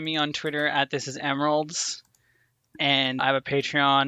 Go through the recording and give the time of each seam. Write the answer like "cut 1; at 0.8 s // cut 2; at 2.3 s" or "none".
cut 1; at 3.2 s